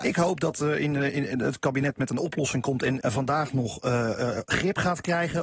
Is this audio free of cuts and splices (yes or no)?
no